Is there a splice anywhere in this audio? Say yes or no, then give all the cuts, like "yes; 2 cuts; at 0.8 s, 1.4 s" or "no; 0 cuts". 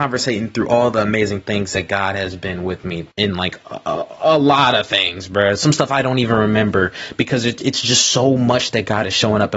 yes; 1 cut; at 3.1 s